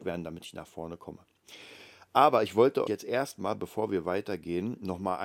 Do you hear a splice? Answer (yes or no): yes